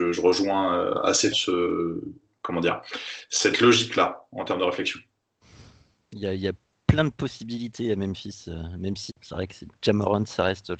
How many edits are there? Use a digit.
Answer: 2